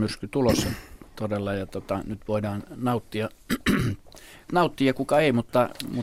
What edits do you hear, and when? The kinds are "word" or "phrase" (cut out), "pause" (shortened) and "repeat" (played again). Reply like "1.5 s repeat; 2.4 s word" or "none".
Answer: 4.5 s phrase